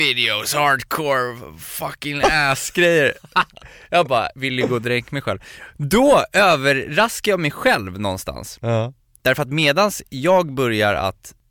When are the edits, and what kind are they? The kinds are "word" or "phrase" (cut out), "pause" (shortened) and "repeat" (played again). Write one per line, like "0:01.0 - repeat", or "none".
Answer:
none